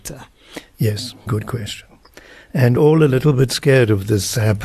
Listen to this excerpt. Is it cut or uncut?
cut